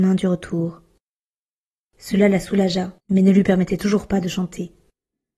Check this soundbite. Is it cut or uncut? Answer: cut